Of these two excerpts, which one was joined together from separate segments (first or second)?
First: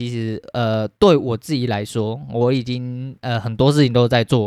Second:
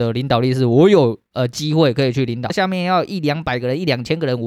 second